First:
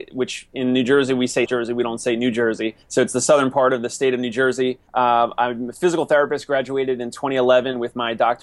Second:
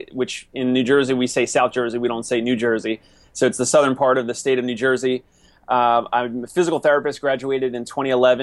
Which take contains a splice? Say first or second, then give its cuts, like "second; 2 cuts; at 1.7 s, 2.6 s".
first; 3 cuts; at 1.5 s, 2.8 s, 4.9 s